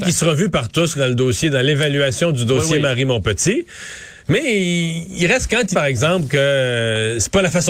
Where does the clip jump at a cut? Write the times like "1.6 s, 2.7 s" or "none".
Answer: 0.9 s, 4.2 s, 5.7 s